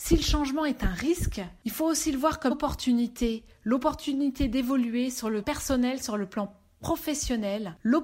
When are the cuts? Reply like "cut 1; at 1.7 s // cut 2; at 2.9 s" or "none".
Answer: cut 1; at 2.5 s // cut 2; at 5.4 s